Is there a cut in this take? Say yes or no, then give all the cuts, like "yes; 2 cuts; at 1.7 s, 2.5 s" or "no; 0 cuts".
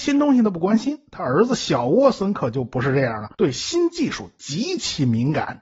yes; 1 cut; at 3.3 s